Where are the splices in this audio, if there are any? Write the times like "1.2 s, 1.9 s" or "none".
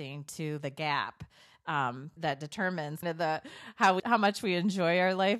2.2 s, 3.0 s, 4.0 s